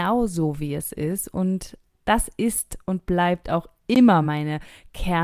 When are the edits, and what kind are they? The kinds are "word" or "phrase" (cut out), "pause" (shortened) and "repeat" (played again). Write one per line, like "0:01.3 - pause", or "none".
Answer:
none